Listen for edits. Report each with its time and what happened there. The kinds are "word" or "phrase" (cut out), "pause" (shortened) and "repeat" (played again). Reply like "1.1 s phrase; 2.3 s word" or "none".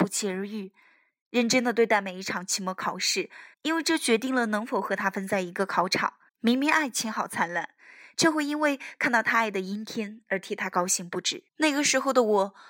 3.5 s pause; 6.3 s pause; 11.5 s pause